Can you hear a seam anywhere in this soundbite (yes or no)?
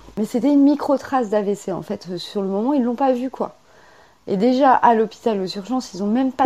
no